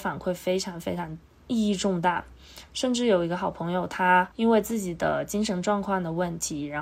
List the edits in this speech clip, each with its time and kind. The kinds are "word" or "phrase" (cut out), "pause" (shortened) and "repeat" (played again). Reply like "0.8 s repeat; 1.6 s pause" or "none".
4.3 s pause